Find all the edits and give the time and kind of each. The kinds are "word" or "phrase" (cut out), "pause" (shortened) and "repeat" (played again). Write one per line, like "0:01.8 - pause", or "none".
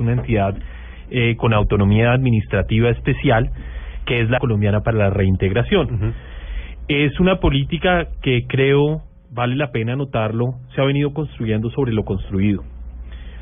0:04.4 - word